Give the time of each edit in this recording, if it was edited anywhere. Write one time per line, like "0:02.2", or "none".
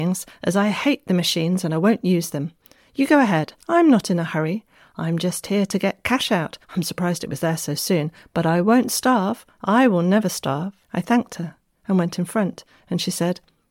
0:03.6
0:06.6
0:10.8